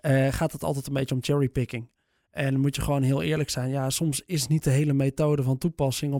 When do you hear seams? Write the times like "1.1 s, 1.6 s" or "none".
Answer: none